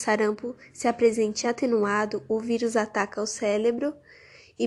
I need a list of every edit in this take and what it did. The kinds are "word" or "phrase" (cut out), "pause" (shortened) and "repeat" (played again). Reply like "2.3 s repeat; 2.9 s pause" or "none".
none